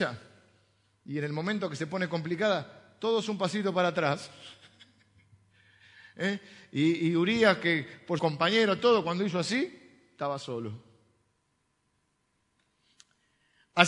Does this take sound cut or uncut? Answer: cut